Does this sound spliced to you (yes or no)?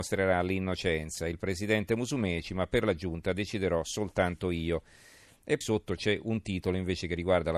yes